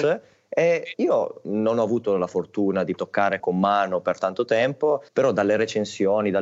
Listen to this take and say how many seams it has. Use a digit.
3